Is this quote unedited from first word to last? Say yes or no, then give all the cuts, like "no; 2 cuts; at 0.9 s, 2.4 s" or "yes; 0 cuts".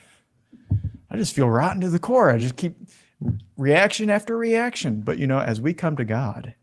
yes; 0 cuts